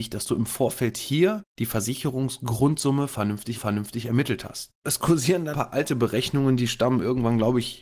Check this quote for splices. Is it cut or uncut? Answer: cut